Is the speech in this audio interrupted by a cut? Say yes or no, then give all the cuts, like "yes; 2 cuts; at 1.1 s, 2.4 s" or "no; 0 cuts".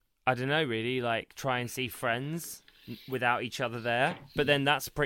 no; 0 cuts